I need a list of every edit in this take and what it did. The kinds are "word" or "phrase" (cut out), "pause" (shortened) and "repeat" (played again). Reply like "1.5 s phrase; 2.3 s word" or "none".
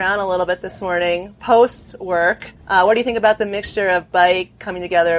2.6 s pause